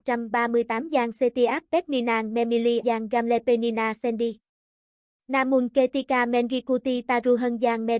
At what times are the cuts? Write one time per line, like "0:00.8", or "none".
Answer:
0:02.8